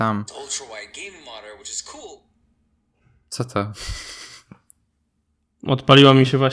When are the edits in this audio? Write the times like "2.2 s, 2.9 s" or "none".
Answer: none